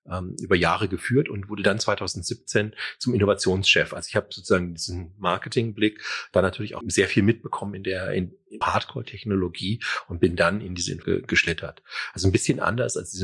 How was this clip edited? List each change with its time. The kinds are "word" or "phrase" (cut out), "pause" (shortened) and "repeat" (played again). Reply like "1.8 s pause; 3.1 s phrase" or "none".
6.8 s word; 8.6 s word; 11.0 s word